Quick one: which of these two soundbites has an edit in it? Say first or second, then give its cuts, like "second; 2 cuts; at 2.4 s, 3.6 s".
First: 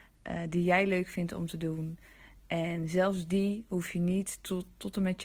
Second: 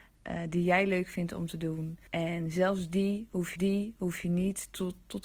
second; 2 cuts; at 2.1 s, 3.6 s